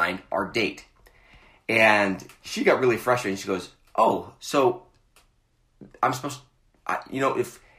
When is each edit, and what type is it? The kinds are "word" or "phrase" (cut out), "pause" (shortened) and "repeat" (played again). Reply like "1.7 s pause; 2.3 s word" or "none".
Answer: none